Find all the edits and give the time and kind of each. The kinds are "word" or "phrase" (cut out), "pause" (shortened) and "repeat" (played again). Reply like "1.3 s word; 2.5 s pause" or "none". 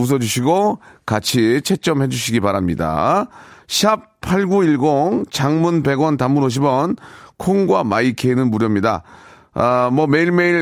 none